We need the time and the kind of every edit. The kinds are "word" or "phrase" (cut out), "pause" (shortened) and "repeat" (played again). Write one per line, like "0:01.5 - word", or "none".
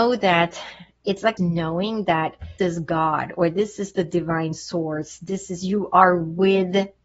0:01.4 - word
0:02.6 - word